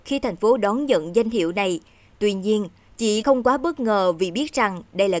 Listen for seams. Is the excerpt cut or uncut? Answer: cut